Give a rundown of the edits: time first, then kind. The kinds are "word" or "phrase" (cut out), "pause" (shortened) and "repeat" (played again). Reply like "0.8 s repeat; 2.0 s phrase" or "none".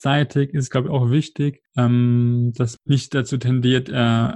2.8 s word